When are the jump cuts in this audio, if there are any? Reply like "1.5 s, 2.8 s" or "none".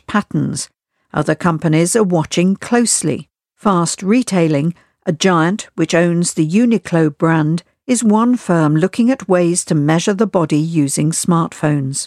none